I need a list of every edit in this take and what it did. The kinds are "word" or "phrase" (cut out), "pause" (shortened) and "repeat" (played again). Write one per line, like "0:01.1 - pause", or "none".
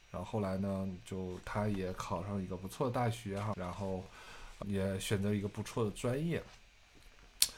0:03.5 - word
0:04.6 - word